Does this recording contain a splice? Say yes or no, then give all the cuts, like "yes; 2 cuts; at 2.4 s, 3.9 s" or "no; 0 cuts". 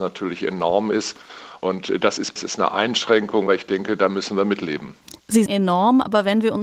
yes; 3 cuts; at 2.4 s, 3.5 s, 5.5 s